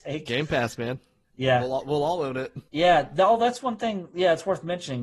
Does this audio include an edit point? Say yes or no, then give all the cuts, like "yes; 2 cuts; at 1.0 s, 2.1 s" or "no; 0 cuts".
yes; 1 cut; at 2.7 s